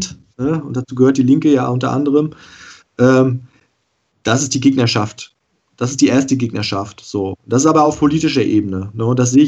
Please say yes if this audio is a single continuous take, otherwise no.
yes